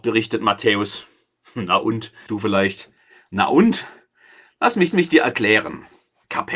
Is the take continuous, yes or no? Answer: no